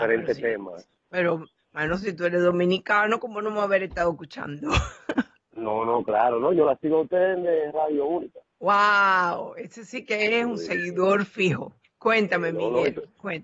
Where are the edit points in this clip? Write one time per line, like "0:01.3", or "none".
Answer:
0:08.5
0:11.8